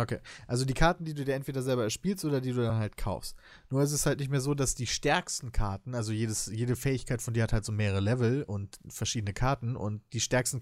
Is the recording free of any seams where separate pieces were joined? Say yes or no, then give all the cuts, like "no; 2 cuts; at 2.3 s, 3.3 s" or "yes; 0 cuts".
yes; 0 cuts